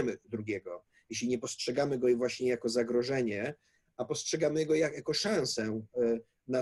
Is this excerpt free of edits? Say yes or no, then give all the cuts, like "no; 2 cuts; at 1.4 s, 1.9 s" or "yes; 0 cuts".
yes; 0 cuts